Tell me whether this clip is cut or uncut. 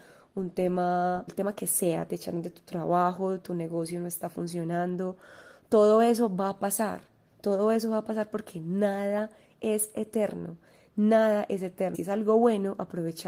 cut